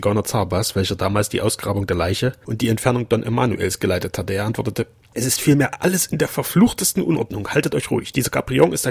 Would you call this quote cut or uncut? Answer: cut